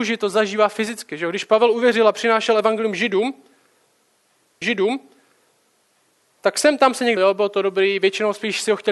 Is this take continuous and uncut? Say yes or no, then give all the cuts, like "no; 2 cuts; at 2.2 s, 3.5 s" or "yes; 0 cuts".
no; 2 cuts; at 4.6 s, 7.2 s